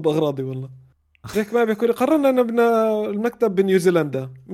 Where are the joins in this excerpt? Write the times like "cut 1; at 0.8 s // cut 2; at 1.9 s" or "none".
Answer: none